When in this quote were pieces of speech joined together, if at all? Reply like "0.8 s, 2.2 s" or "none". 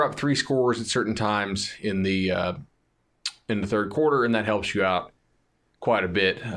none